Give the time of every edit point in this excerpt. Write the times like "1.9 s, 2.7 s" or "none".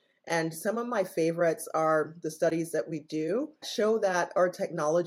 3.6 s